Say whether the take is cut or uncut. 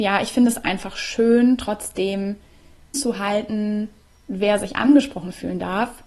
cut